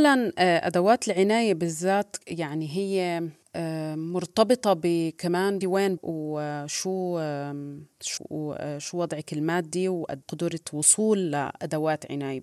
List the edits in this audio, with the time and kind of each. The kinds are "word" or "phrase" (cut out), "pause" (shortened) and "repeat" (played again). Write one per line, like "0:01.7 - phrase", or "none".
0:02.2 - pause
0:05.6 - word
0:06.0 - word
0:08.2 - word
0:10.2 - word